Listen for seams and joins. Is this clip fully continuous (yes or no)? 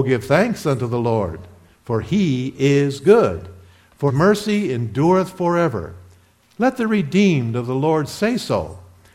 no